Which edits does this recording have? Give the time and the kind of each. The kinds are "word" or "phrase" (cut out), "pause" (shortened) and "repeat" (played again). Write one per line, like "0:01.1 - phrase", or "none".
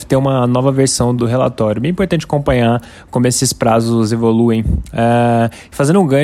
0:01.2 - word